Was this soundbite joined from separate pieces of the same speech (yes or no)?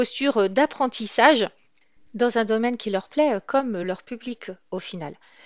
no